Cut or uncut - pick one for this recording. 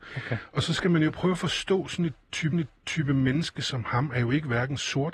cut